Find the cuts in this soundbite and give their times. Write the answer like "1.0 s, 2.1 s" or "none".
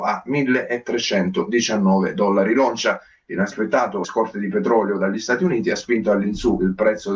4.0 s